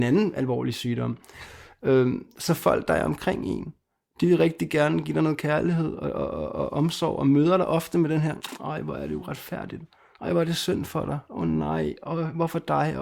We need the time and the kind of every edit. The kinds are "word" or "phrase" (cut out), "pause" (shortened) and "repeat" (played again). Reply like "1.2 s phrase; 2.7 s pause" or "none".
none